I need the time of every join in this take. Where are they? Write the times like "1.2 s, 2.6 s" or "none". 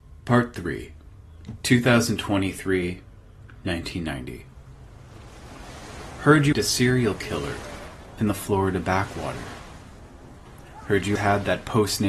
6.5 s, 8.2 s, 11.2 s